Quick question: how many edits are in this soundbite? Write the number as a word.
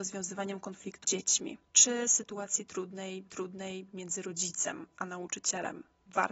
two